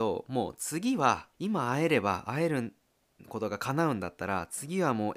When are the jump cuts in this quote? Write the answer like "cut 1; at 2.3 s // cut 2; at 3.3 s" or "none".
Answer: cut 1; at 1.3 s